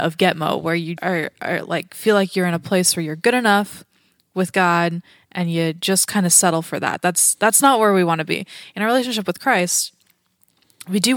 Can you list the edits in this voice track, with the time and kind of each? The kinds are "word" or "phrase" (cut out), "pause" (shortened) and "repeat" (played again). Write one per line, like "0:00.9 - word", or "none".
0:01.0 - word